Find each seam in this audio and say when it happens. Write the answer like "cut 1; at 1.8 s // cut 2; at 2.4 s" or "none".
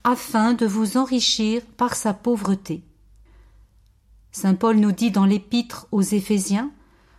none